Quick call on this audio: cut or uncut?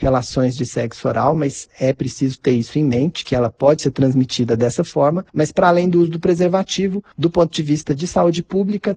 uncut